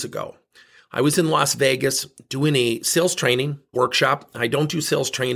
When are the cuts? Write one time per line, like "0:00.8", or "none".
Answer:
0:03.7